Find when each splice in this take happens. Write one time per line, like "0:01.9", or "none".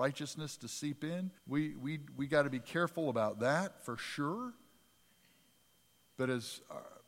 0:01.4
0:05.6